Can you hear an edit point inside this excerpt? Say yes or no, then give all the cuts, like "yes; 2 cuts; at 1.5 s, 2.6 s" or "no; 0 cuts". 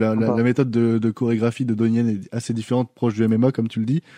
no; 0 cuts